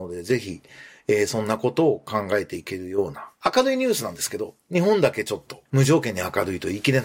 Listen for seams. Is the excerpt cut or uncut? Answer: cut